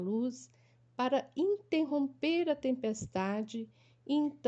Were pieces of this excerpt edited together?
no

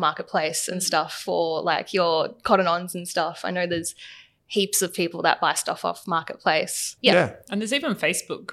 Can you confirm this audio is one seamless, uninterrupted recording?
no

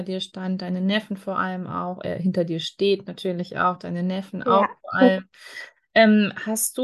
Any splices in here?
no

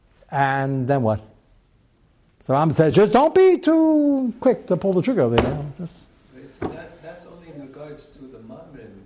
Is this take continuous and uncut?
yes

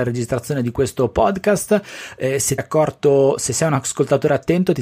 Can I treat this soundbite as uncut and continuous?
no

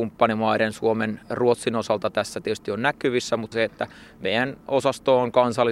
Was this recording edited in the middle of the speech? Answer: yes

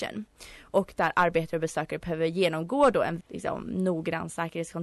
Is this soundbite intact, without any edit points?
no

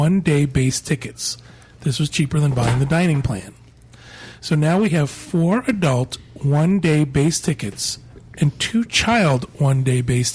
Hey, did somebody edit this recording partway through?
no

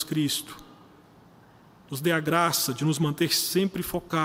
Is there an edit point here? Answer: no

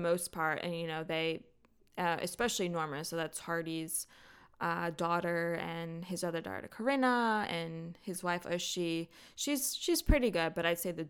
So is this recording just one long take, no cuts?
yes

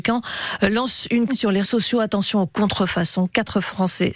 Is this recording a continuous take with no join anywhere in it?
no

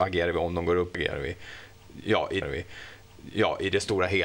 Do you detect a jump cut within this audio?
yes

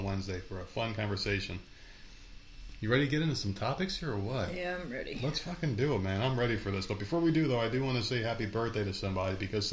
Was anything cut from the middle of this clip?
no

